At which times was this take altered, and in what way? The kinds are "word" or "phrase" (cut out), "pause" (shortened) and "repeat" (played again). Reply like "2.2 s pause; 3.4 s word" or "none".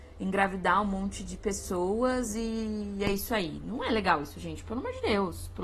none